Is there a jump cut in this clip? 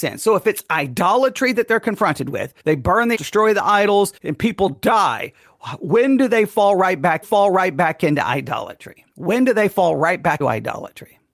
yes; 6 cuts; at 2.6 s, 3.1 s, 4.2 s, 7.2 s, 9.1 s, 10.4 s

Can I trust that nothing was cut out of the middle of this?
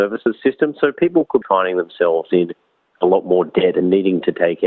no; 1 cut; at 1.4 s

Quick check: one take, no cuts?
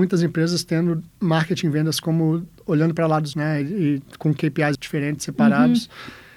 no; 3 cuts; at 1.1 s, 3.3 s, 4.7 s

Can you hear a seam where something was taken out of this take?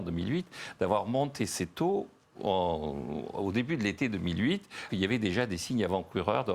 yes; 1 cut; at 4.9 s

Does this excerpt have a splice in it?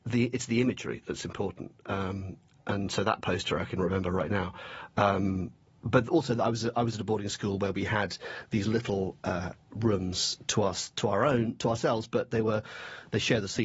no; 0 cuts

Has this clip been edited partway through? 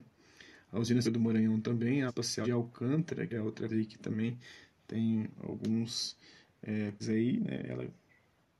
yes; 6 cuts; at 1.0 s, 2.1 s, 2.4 s, 3.3 s, 3.7 s, 7.0 s

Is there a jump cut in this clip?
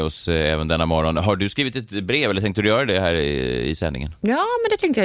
no; 0 cuts

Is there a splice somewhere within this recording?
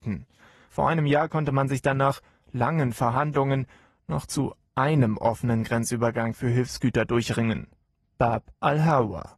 no; 0 cuts

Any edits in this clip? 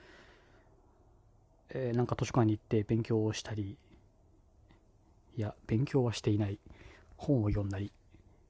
no; 0 cuts

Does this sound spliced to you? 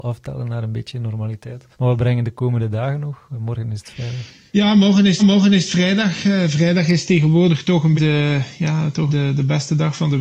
yes; 5 cuts; at 1.7 s, 4.5 s, 5.2 s, 8.0 s, 9.1 s

